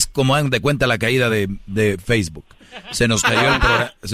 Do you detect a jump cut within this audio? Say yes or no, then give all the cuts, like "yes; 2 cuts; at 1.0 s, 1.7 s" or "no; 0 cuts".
no; 0 cuts